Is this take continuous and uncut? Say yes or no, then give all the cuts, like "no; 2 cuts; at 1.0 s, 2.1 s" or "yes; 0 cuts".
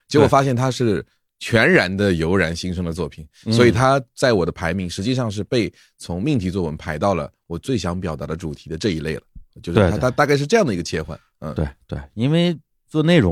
yes; 0 cuts